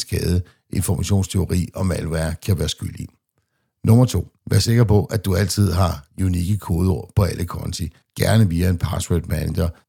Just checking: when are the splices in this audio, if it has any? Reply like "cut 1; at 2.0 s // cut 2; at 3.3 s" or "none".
none